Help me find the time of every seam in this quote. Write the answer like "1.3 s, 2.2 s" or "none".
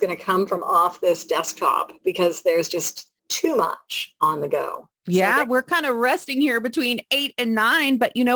3.2 s, 5.0 s